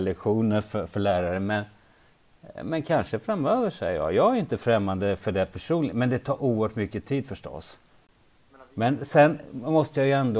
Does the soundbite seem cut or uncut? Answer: uncut